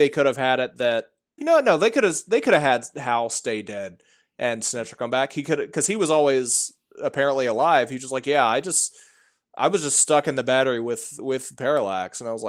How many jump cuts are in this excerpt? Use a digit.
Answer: 1